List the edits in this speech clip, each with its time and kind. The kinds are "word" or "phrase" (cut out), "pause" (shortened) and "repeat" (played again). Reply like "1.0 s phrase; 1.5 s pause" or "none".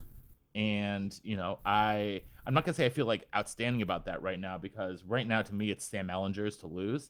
none